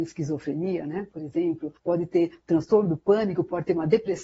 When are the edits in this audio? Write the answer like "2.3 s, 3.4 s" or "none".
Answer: 1.8 s